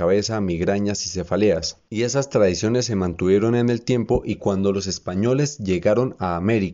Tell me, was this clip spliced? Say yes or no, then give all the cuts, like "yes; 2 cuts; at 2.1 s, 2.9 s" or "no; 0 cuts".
no; 0 cuts